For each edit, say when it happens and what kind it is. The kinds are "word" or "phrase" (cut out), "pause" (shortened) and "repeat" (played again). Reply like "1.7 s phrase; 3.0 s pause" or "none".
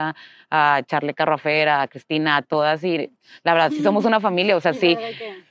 none